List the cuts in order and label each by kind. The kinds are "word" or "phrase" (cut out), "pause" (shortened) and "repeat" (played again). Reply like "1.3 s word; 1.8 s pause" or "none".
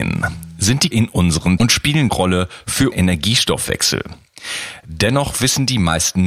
0.9 s word; 1.6 s word; 2.1 s phrase; 2.9 s word